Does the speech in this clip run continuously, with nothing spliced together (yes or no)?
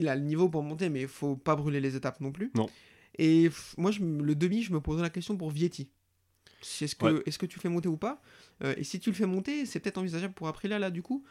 yes